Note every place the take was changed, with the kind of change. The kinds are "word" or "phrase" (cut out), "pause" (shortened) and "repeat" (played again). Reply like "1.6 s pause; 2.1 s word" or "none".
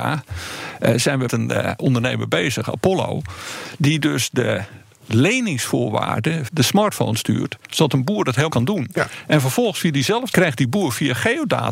1.3 s word; 1.8 s word; 6.5 s word; 8.5 s word; 10.3 s word